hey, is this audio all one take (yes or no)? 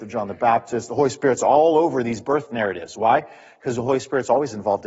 yes